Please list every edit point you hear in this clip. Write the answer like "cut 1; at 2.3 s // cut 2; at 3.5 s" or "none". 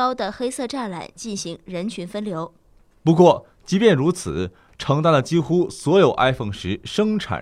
none